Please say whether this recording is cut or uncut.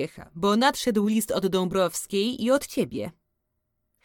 uncut